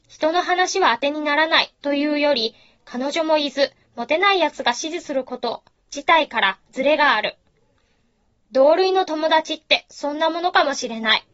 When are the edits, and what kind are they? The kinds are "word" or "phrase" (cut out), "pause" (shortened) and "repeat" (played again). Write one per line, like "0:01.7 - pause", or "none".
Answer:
none

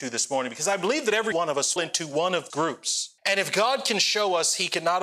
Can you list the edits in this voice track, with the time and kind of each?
0:01.3 - word
0:01.8 - word
0:02.5 - word
0:03.2 - pause

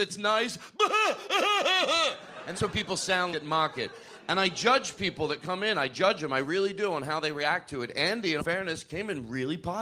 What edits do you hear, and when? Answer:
0:02.5 - word
0:03.3 - word
0:08.4 - word

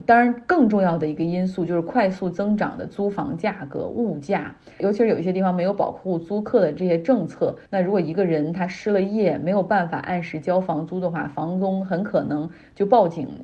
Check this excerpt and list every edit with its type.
0:07.7 - pause

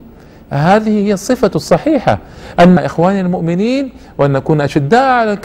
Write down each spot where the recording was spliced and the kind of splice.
0:02.8 - phrase

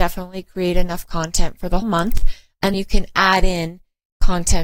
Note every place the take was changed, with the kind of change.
0:01.8 - word
0:02.7 - word

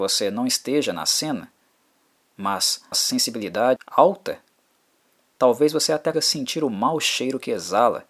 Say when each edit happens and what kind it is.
0:02.9 - word
0:03.8 - word
0:06.1 - word

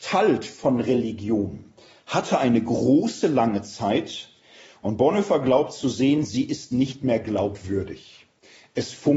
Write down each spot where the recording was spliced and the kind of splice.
none

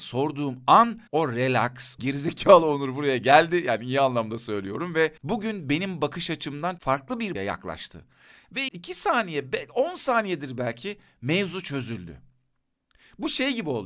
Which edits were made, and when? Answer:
0:01.1 - pause
0:02.0 - phrase
0:05.2 - pause
0:06.8 - word
0:07.4 - phrase
0:08.7 - phrase

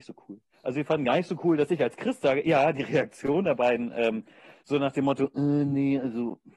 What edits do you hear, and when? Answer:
none

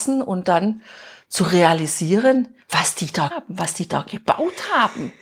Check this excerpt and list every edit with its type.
0:02.6 - pause
0:03.3 - word

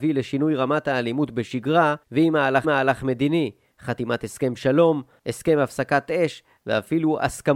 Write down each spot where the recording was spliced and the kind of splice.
0:02.0 - pause
0:02.6 - repeat

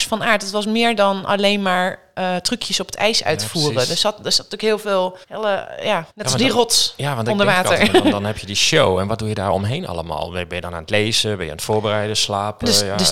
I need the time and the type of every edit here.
0:05.2 - pause
0:06.1 - pause

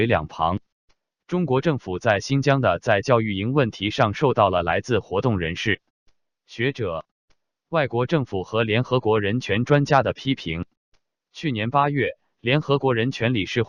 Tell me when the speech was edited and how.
none

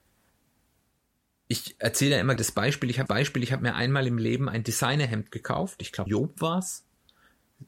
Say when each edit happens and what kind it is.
0:02.4 - word
0:03.1 - repeat
0:06.1 - word

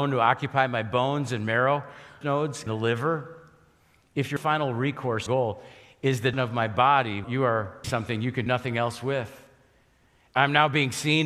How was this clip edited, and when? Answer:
0:02.2 - word
0:02.7 - word
0:04.4 - word
0:05.3 - word
0:06.3 - word
0:07.2 - word
0:07.8 - word
0:08.5 - word

